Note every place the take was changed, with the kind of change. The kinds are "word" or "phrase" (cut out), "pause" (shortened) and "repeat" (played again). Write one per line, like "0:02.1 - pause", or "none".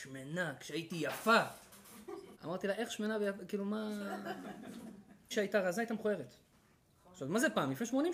0:02.4 - pause
0:05.3 - phrase